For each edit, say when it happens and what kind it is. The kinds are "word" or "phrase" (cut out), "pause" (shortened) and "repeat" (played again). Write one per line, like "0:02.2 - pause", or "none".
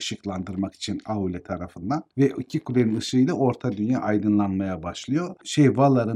none

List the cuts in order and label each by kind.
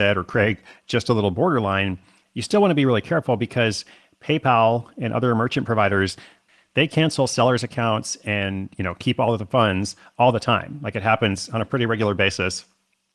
none

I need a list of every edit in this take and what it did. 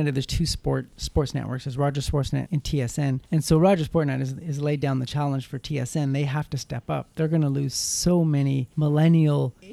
0:02.5 - word

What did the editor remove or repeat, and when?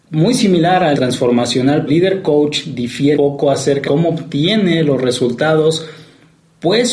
0:00.9 - word
0:01.9 - word
0:03.2 - word
0:03.9 - word

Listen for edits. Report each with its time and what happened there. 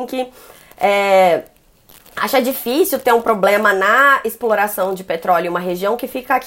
none

